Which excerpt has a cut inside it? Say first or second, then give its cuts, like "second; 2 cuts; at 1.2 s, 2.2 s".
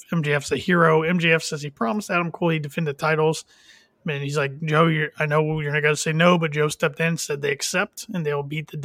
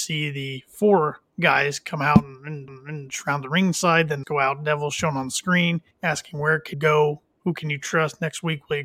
second; 4 cuts; at 2.7 s, 4.2 s, 5.9 s, 6.7 s